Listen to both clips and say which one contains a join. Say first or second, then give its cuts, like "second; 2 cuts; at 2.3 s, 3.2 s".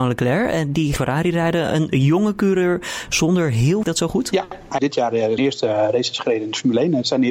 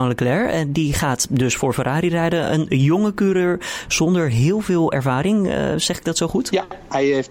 first; 4 cuts; at 1.0 s, 3.8 s, 4.8 s, 5.4 s